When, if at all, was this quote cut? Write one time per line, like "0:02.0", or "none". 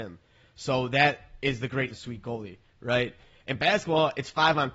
0:01.9

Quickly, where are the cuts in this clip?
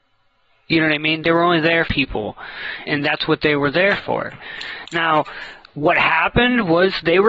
0:01.9
0:02.9

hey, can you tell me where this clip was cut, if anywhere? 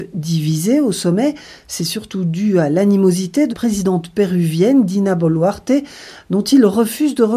0:03.5

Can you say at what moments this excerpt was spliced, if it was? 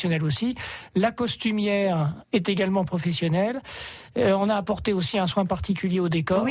0:02.2

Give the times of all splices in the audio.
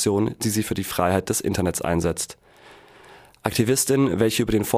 none

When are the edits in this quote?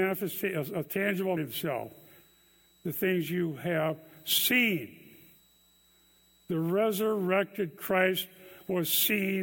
0:01.4

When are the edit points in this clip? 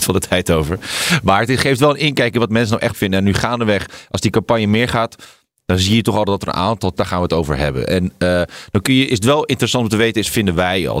0:02.9
0:07.0

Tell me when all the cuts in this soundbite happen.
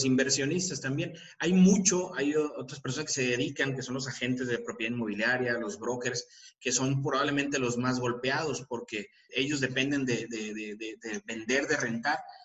0:09.3

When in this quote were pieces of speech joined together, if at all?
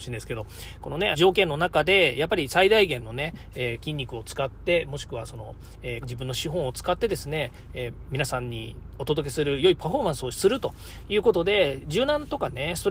0:01.1
0:06.0

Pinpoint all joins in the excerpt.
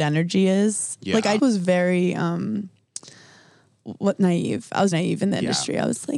0:01.4
0:04.9

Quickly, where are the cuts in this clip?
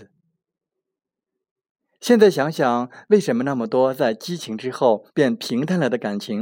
0:05.1

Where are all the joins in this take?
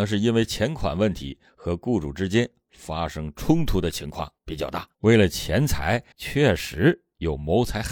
0:04.4
0:04.9
0:06.1

